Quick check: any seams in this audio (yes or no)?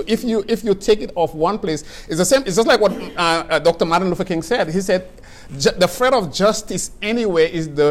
no